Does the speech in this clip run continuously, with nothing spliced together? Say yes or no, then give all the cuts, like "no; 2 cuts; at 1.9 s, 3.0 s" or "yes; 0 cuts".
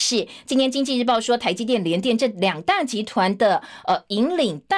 yes; 0 cuts